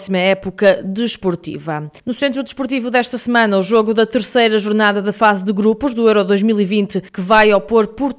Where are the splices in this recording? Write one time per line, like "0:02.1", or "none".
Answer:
0:02.0
0:07.1

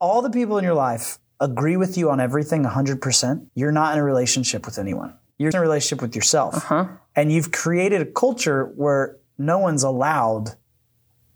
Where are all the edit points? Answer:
0:03.5
0:05.5

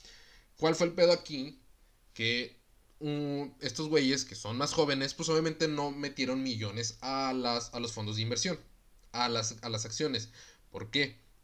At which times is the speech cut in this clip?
none

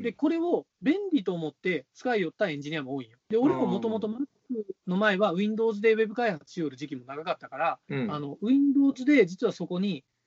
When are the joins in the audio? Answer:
0:03.2
0:07.8

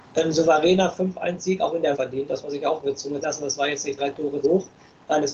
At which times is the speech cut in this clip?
0:01.9
0:02.4
0:03.2
0:04.0
0:04.4

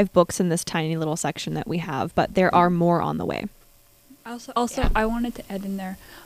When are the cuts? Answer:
0:04.2

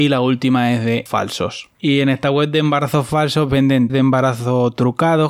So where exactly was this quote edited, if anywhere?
0:01.1
0:01.7
0:03.9

